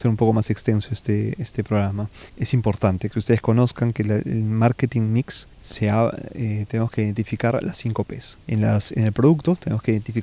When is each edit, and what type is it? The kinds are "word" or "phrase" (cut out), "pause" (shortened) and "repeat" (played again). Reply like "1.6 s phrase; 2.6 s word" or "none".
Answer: 2.3 s pause; 5.5 s pause; 8.4 s pause